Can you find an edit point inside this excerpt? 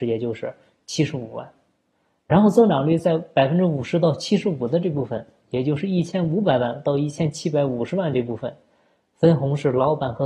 no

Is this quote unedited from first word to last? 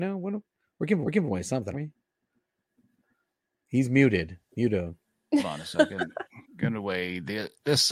no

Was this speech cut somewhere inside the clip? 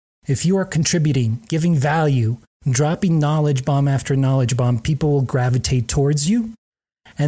no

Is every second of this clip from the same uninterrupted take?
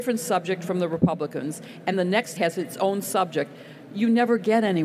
no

